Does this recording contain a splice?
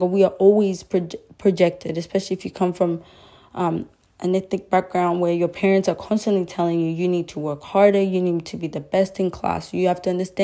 no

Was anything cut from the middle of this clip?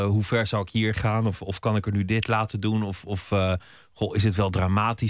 no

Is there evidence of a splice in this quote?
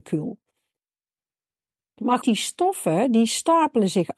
yes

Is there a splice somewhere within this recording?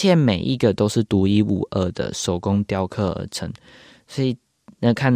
no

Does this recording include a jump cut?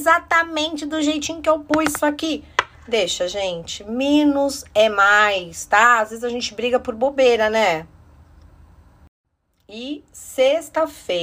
no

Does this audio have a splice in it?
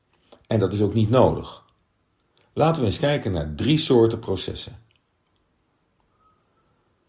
no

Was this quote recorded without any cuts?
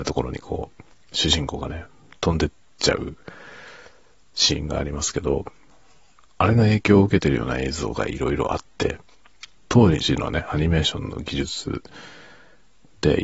no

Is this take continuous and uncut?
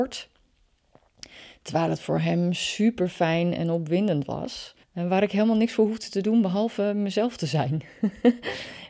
no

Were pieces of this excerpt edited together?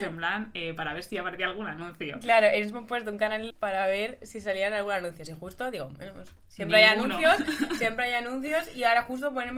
yes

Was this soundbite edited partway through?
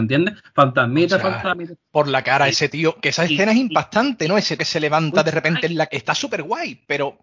yes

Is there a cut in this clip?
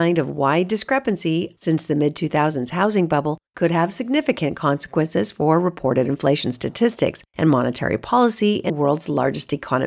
yes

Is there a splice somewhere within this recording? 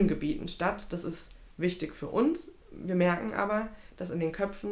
no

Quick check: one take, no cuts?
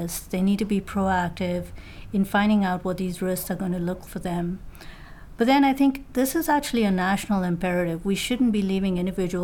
no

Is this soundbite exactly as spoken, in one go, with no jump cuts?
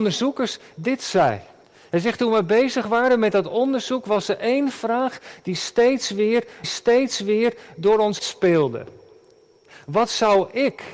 no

